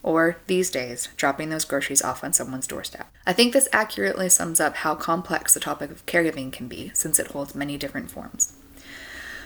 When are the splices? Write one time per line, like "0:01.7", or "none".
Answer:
0:03.1